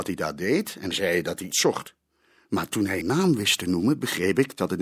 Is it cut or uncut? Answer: cut